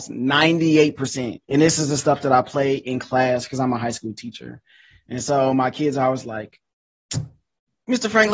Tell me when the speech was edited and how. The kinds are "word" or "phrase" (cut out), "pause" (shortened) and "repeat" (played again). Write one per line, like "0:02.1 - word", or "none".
0:01.4 - pause